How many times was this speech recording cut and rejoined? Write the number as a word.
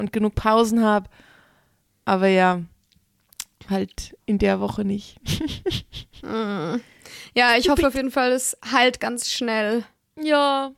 one